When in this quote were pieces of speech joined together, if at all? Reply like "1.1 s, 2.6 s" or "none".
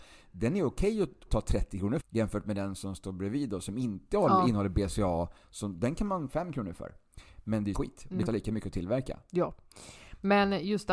1.3 s, 2.0 s, 6.3 s, 7.7 s, 8.3 s